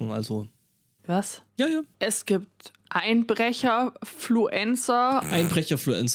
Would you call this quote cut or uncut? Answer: cut